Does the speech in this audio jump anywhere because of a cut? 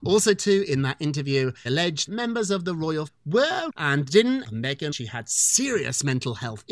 yes; 6 cuts; at 1.7 s, 2.1 s, 3.1 s, 3.7 s, 4.4 s, 4.9 s

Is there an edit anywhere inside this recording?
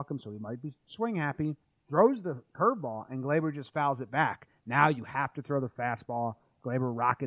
yes; 1 cut; at 1.6 s

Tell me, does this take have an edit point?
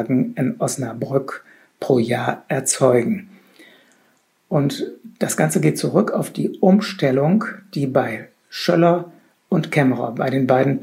no; 0 cuts

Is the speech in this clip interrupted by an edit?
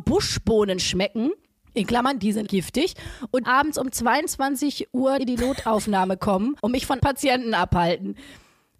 yes; 6 cuts; at 1.6 s, 2.5 s, 3.4 s, 5.2 s, 6.6 s, 7.0 s

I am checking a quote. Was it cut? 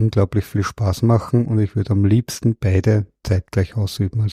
no; 0 cuts

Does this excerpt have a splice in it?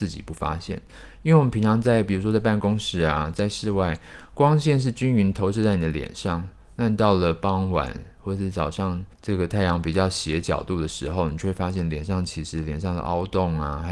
yes; 1 cut; at 9.1 s

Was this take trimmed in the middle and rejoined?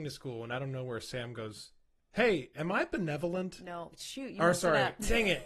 no; 0 cuts

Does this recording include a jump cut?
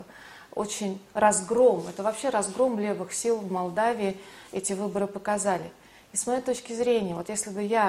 no; 0 cuts

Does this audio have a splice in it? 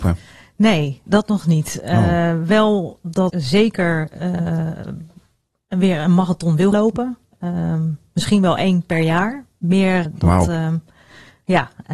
yes; 4 cuts; at 1.1 s, 3.3 s, 6.7 s, 10.1 s

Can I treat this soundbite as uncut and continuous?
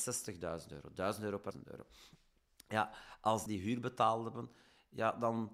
no; 2 cuts; at 1.5 s, 3.5 s

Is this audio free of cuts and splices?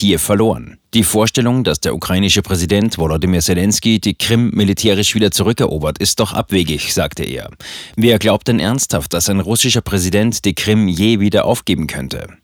yes; 0 cuts

